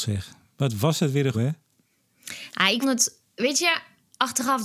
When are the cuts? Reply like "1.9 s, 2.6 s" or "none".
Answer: 1.3 s, 2.8 s